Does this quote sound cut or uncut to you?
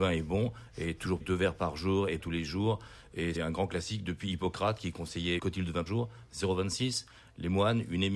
cut